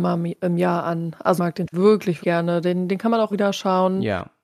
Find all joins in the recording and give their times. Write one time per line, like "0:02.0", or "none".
0:01.4
0:01.7
0:02.2
0:03.3